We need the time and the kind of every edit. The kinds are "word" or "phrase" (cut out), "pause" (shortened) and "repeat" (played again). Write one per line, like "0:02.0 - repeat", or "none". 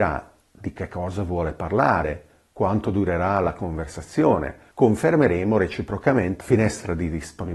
0:04.7 - pause
0:06.4 - word